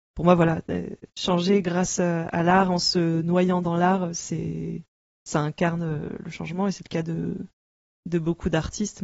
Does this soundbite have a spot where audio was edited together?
no; 0 cuts

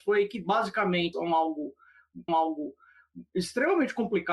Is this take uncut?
no; 2 cuts; at 1.1 s, 2.3 s

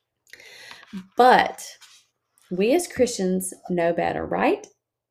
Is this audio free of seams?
yes; 0 cuts

